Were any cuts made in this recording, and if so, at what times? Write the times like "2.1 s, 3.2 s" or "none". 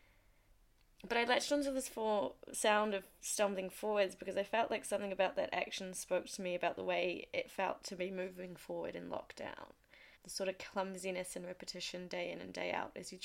10.2 s